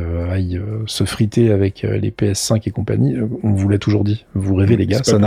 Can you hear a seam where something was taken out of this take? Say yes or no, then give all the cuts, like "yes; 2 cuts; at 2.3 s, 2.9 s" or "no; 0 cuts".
no; 0 cuts